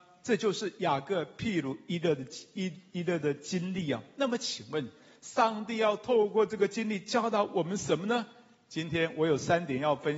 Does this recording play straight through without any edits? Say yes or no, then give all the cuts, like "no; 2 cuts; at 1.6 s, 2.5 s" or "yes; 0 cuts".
yes; 0 cuts